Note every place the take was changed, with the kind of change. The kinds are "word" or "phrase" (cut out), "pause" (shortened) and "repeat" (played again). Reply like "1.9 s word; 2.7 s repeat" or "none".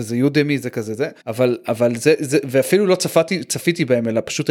1.2 s pause